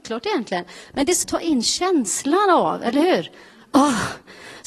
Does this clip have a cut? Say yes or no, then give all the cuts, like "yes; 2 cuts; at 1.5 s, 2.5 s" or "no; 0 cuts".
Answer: yes; 1 cut; at 1.2 s